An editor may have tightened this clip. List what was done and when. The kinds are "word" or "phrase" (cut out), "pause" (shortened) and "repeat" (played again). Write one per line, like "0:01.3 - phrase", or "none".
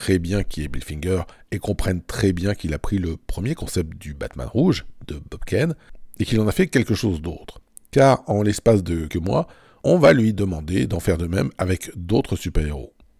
0:09.1 - word